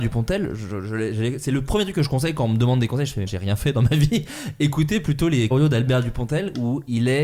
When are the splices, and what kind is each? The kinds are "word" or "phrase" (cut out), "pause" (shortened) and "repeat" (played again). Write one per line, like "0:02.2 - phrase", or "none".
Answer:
0:03.3 - word
0:05.5 - word